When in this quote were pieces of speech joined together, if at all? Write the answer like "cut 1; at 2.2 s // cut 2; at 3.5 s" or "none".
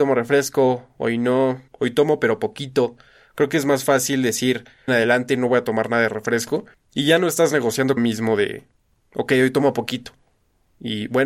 cut 1; at 1.7 s // cut 2; at 4.9 s // cut 3; at 6.7 s // cut 4; at 8.0 s